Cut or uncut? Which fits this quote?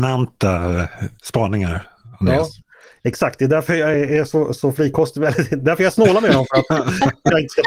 uncut